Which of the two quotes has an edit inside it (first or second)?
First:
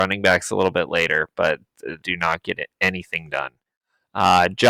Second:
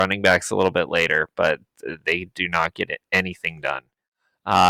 first